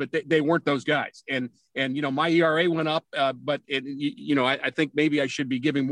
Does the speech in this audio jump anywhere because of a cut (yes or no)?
no